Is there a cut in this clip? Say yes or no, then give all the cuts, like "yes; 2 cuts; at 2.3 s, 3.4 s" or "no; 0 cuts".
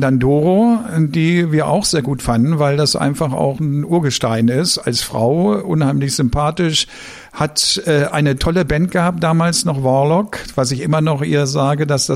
no; 0 cuts